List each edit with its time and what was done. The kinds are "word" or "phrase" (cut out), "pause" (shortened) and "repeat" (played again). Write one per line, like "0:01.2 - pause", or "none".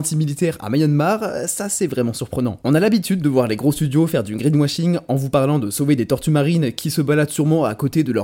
none